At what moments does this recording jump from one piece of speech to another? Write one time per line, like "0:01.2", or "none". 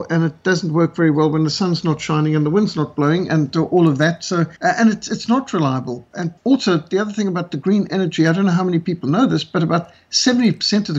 0:04.6
0:06.4